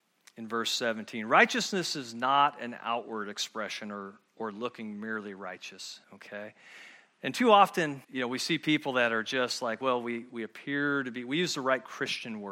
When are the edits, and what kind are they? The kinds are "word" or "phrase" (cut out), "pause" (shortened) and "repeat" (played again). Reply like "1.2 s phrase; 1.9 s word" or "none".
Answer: 6.0 s pause; 8.0 s pause